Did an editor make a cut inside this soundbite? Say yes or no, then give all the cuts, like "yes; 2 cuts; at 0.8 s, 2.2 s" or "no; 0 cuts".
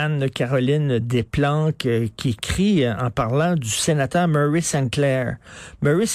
no; 0 cuts